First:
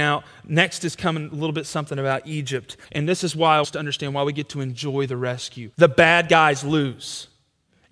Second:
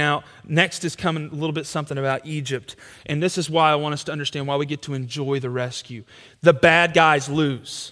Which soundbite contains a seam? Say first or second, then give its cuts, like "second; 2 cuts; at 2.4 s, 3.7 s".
first; 3 cuts; at 2.8 s, 3.6 s, 5.7 s